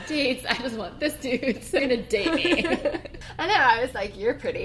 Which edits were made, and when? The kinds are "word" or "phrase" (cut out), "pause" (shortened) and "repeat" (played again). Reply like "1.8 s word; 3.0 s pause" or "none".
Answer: 1.8 s word